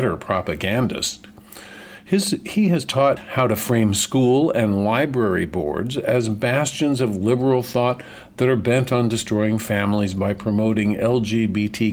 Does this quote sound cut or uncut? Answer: cut